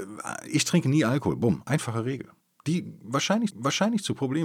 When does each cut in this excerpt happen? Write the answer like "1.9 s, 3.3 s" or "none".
2.4 s, 3.5 s